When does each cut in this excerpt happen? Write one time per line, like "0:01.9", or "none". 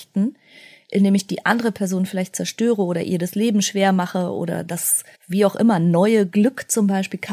0:05.1